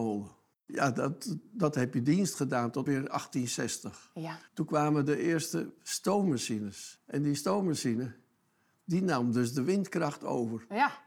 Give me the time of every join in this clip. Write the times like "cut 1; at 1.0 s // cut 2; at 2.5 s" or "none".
cut 1; at 2.9 s // cut 2; at 4.5 s